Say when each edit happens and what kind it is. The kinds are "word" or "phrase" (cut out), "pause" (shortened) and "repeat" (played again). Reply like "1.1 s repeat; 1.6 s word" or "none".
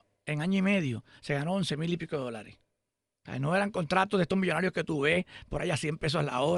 none